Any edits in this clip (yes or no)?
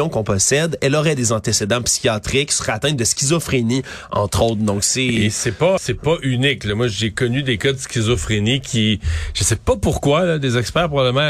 yes